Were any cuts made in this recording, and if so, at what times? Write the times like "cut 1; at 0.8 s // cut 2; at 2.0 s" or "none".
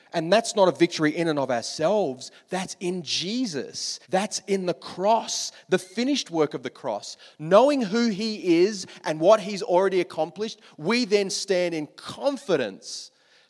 cut 1; at 4.0 s